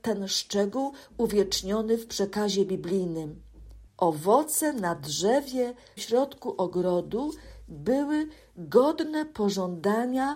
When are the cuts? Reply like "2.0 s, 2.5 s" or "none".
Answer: 3.9 s, 6.0 s